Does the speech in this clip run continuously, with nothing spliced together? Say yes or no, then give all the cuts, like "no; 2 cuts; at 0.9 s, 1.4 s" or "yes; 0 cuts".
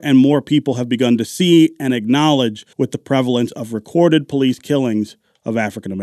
no; 1 cut; at 2.7 s